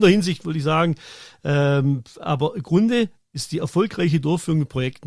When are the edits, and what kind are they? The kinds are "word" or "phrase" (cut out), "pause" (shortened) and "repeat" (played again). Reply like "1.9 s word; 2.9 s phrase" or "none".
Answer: none